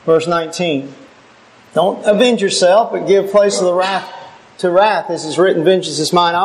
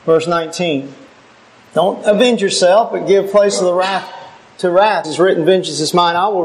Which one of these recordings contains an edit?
second; 1 cut; at 5.0 s

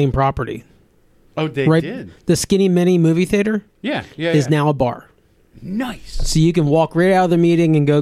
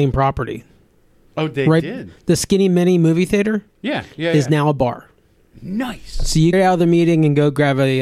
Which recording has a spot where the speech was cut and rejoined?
second; 1 cut; at 6.5 s

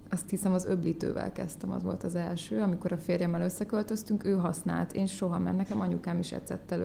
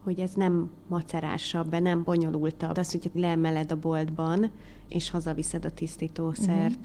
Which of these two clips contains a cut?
second; 3 cuts; at 2.7 s, 3.1 s, 4.9 s

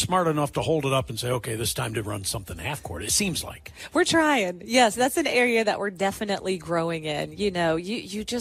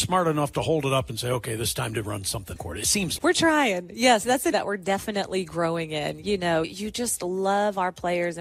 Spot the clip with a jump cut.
second; 4 cuts; at 2.6 s, 3.2 s, 4.5 s, 6.6 s

